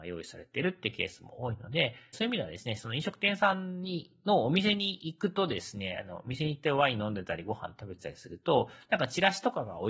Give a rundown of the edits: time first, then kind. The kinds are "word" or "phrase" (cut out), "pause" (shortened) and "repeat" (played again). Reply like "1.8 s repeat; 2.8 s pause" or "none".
2.1 s word